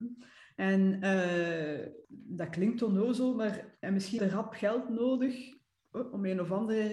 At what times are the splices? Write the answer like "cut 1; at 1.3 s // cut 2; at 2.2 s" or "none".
cut 1; at 2.0 s // cut 2; at 3.8 s // cut 3; at 4.2 s